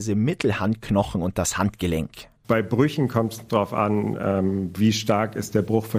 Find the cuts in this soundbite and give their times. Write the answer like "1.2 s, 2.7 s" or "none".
2.4 s